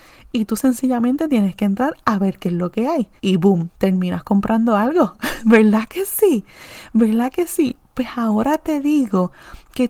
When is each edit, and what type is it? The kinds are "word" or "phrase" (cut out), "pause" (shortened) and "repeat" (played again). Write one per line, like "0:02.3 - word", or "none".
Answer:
0:03.2 - pause